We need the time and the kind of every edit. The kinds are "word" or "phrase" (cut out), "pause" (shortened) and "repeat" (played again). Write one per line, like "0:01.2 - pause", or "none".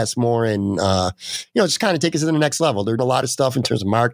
0:03.0 - word